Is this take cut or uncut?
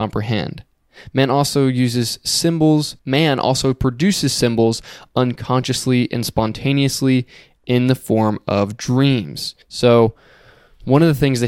cut